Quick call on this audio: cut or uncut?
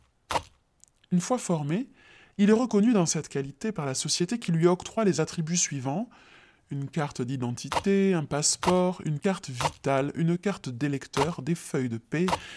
uncut